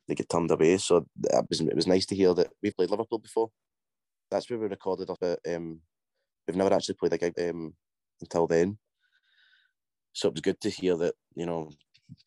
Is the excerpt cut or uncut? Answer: cut